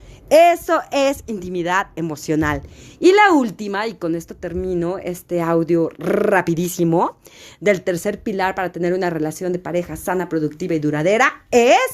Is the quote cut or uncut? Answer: uncut